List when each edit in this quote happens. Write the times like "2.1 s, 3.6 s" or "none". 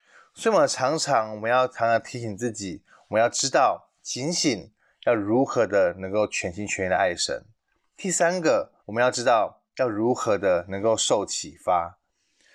8.8 s